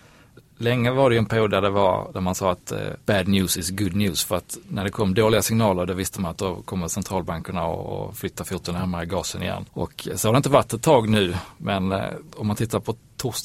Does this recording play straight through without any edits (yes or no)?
no